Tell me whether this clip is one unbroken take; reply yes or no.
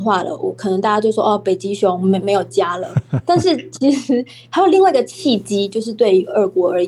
yes